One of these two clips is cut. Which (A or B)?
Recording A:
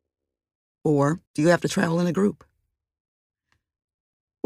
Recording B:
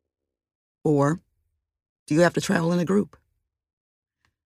A